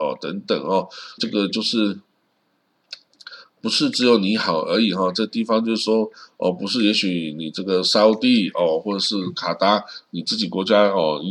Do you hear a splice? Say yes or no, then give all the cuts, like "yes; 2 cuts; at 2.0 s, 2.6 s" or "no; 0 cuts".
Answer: yes; 1 cut; at 1.2 s